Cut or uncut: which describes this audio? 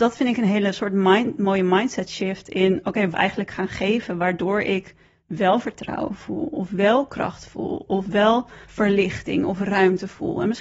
cut